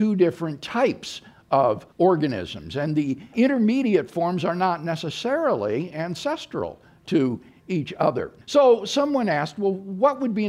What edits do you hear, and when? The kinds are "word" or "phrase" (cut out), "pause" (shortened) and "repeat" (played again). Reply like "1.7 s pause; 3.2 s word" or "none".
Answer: 1.9 s pause; 3.3 s word; 8.4 s pause